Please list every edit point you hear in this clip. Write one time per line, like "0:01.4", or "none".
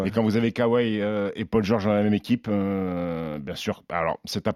none